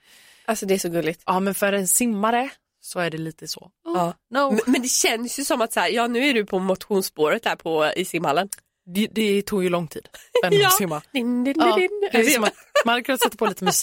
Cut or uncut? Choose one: cut